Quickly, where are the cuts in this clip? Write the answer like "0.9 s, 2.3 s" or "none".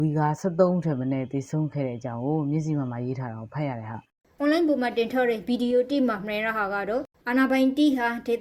4.1 s

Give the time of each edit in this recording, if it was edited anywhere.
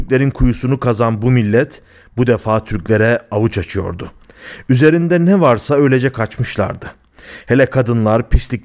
none

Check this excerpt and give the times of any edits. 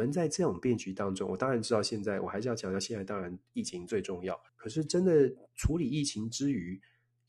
4.5 s

